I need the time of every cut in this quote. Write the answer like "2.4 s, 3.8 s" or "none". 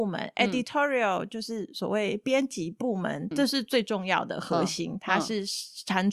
3.3 s